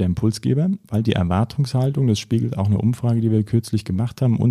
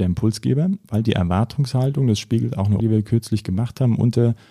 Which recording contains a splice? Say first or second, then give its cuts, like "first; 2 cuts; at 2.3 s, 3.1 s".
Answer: second; 1 cut; at 2.8 s